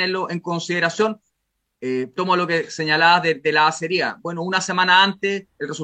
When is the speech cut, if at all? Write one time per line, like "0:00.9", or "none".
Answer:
0:02.2